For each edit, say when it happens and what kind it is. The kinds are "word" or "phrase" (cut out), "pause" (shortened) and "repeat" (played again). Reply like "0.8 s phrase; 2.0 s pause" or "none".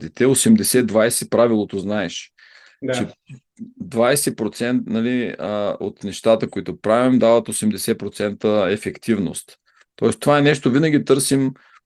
none